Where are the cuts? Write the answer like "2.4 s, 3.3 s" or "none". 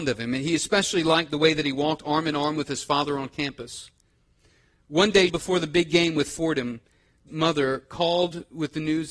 5.3 s, 7.3 s